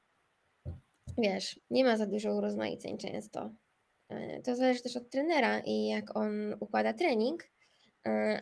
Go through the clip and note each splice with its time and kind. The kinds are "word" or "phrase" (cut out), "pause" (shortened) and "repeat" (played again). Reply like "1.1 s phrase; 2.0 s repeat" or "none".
1.6 s pause